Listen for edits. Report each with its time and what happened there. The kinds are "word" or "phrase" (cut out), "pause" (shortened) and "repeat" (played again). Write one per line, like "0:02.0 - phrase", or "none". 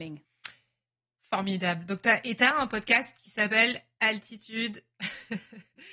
none